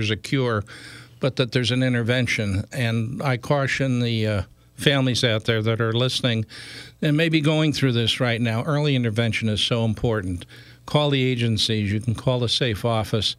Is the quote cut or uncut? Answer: uncut